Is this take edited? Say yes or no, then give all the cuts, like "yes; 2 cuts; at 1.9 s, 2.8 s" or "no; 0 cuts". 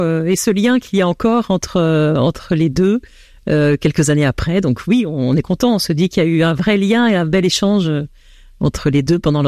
no; 0 cuts